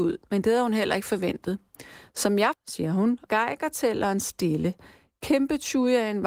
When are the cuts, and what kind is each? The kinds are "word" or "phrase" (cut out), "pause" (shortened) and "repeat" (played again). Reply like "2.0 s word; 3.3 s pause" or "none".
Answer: 2.5 s word; 3.3 s word